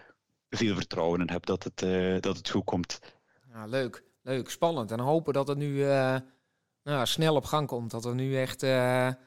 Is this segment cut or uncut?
uncut